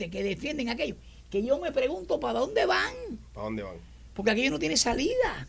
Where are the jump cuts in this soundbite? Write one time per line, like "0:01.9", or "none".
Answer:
none